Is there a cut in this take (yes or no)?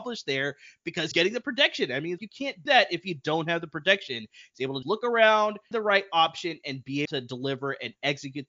yes